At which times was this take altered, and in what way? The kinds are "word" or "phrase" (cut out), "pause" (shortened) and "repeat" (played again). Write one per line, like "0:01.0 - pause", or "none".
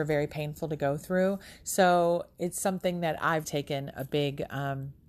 0:03.4 - word

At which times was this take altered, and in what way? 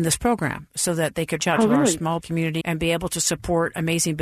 0:01.4 - word
0:02.2 - word
0:02.6 - word

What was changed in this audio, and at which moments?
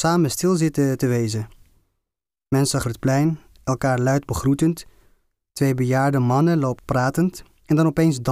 0:02.8 - phrase
0:06.8 - word

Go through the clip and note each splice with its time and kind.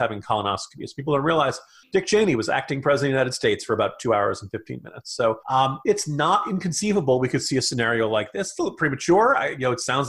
0:01.8 - pause
0:05.4 - pause

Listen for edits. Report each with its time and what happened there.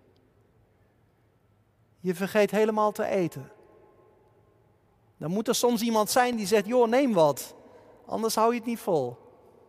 none

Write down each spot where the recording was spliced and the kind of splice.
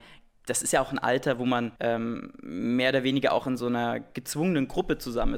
0:01.8 - pause

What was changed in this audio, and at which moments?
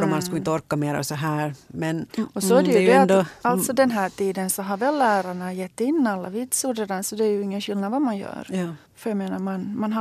0:02.1 - pause
0:08.9 - pause

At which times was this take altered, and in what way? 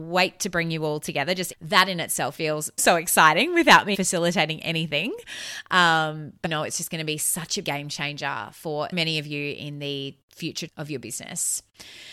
0:01.5 - word
0:02.4 - word
0:02.8 - word
0:03.9 - word
0:06.4 - word
0:07.6 - word
0:08.9 - word
0:10.7 - word

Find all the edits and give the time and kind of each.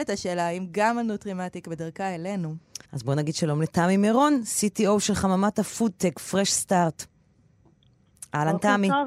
0:02.8 - pause

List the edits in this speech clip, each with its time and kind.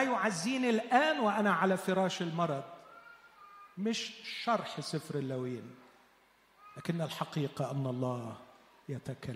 0:03.7 - pause

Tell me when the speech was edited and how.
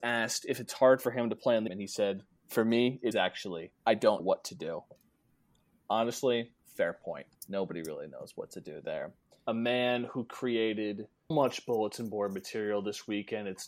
0:01.7 - phrase
0:03.1 - word
0:03.8 - pause
0:04.2 - word
0:06.6 - pause
0:07.4 - pause
0:09.5 - phrase
0:11.3 - word

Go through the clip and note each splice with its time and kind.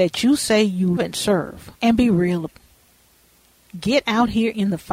0:01.0 - word
0:01.8 - pause
0:02.5 - word

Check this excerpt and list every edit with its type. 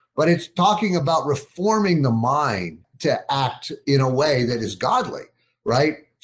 none

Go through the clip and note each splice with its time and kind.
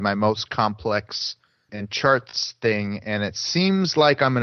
0:01.7 - word

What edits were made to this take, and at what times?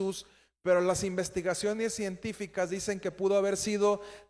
none

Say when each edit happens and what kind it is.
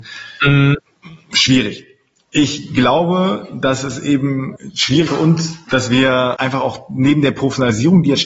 0:05.1 - word

